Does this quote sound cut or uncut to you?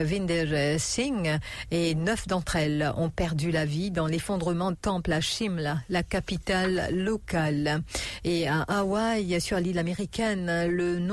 cut